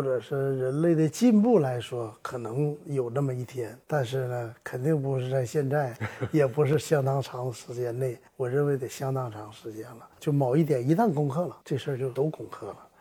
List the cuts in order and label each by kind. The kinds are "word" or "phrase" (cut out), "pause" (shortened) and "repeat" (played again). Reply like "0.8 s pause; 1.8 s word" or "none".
3.8 s pause; 8.3 s pause